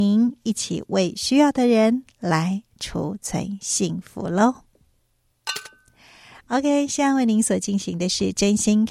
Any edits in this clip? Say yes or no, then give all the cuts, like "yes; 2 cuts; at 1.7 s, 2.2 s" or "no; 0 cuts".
no; 0 cuts